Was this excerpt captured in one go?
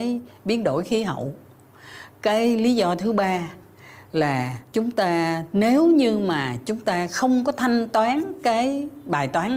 yes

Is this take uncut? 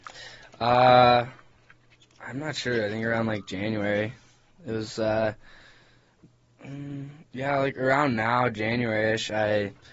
yes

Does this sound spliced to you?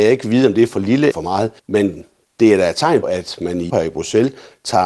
yes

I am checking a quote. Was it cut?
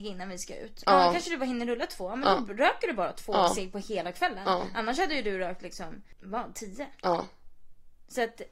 no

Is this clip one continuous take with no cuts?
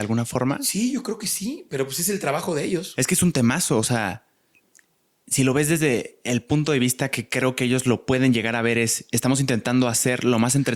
yes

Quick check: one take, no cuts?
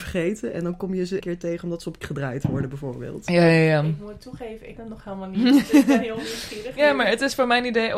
no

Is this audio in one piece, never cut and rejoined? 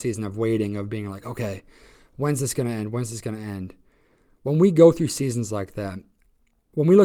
yes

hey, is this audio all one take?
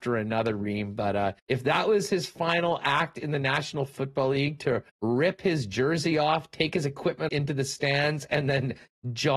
no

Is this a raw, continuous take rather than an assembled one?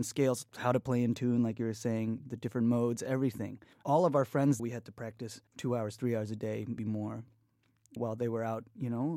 no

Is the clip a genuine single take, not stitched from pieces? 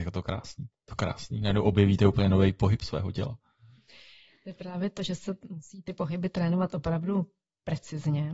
yes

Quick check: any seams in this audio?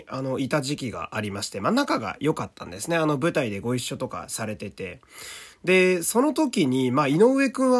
no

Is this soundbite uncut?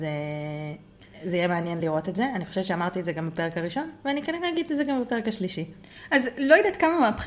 yes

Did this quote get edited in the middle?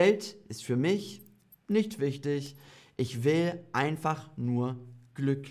no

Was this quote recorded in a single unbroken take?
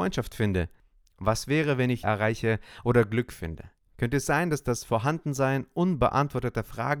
no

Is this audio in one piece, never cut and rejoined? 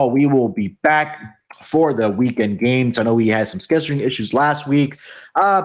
yes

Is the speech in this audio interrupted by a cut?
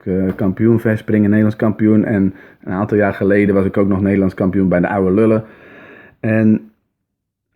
no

